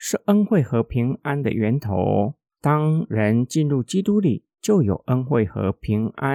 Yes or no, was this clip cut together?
yes